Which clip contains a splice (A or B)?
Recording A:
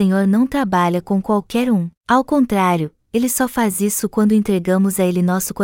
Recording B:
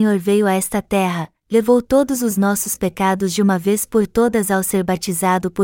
A